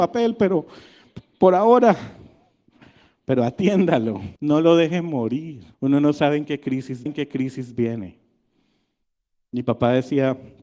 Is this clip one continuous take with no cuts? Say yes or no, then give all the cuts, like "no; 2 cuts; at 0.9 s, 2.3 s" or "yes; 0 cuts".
no; 3 cuts; at 4.4 s, 5.7 s, 7.1 s